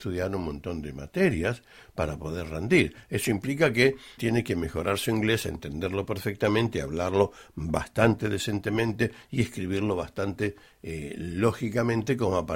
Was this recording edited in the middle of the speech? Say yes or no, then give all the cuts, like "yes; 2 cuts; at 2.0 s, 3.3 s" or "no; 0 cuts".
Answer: yes; 1 cut; at 4.2 s